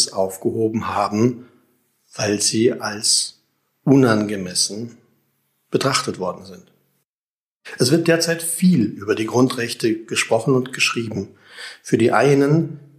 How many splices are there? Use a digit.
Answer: 0